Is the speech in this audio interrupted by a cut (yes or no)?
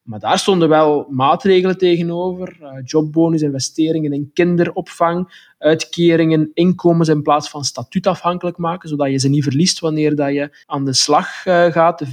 yes